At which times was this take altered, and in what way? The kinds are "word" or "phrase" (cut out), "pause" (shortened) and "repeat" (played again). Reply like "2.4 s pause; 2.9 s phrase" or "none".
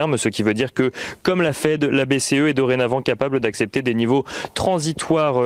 none